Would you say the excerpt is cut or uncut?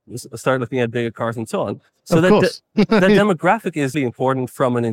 cut